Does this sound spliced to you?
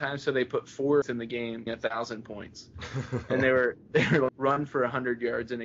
yes; 4 cuts; at 1.0 s, 1.7 s, 3.8 s, 4.3 s

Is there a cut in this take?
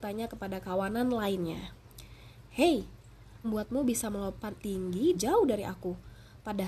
yes; 3 cuts; at 3.4 s, 4.6 s, 5.1 s

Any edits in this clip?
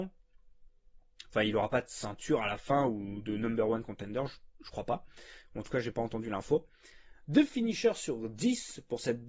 no; 0 cuts

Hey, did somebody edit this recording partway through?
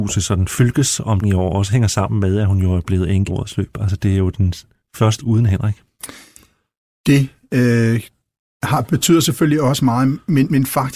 yes; 3 cuts; at 1.2 s, 3.3 s, 5.2 s

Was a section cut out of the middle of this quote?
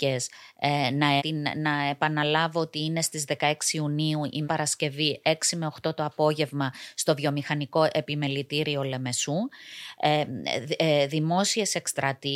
yes; 2 cuts; at 1.2 s, 4.4 s

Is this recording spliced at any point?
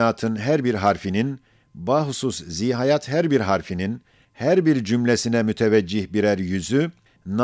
no; 0 cuts

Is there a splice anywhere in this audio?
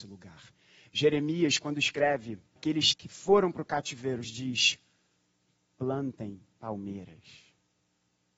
yes; 3 cuts; at 2.6 s, 2.9 s, 4.2 s

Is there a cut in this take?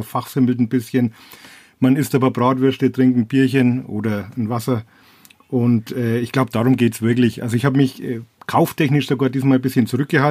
no; 0 cuts

